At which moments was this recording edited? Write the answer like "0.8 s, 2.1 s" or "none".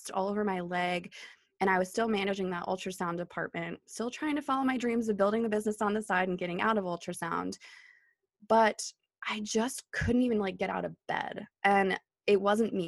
none